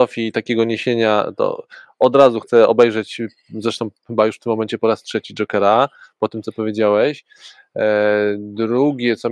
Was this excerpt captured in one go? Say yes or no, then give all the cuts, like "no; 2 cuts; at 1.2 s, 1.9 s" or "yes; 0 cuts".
yes; 0 cuts